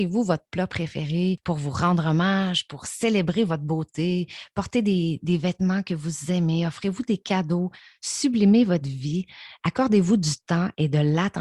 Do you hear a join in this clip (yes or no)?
no